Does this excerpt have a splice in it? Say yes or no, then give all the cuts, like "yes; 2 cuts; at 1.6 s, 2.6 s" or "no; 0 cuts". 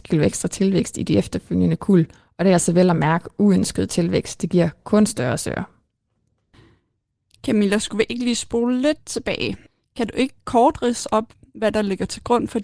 no; 0 cuts